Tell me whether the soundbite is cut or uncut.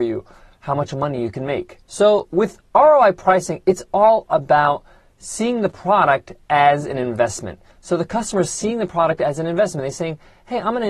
cut